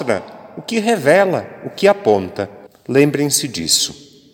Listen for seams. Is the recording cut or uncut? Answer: cut